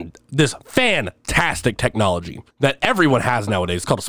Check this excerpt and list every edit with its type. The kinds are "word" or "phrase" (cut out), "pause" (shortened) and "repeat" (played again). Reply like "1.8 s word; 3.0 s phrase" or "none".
2.5 s pause